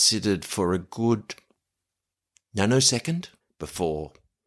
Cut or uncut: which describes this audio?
cut